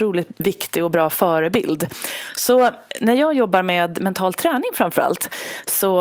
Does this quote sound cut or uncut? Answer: uncut